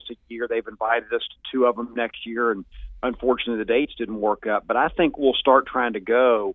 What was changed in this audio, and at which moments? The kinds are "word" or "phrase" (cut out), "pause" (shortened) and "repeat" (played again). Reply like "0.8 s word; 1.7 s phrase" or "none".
none

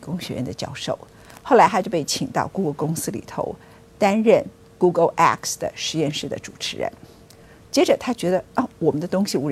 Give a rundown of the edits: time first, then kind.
none

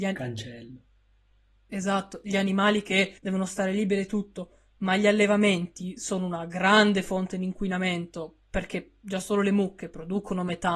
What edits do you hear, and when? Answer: 3.2 s pause

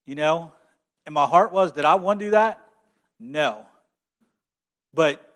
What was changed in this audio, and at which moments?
none

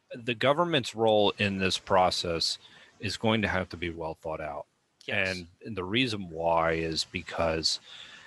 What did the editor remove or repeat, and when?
3.9 s word

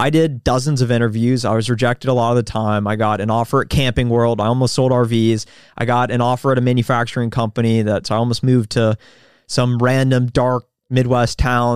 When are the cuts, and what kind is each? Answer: none

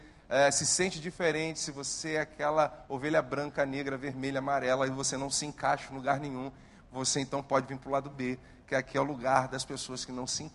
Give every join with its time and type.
none

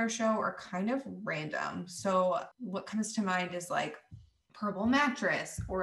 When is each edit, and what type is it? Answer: none

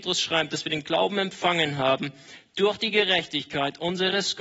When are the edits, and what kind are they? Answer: none

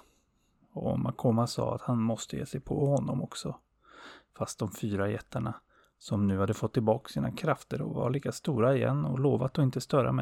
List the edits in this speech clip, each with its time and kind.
none

